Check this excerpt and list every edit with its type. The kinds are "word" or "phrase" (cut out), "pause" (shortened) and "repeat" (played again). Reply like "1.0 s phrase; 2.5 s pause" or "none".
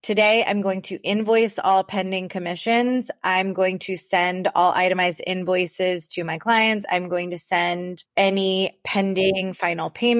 8.1 s pause